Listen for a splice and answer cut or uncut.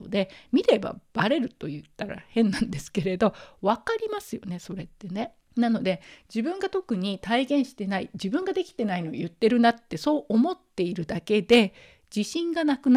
cut